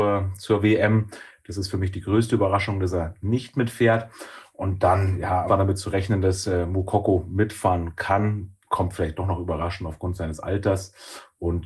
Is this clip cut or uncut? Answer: cut